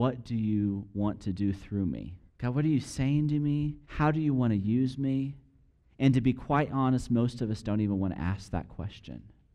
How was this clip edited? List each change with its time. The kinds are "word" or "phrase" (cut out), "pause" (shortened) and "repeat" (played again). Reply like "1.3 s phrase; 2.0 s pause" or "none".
2.3 s pause; 3.8 s pause; 5.7 s pause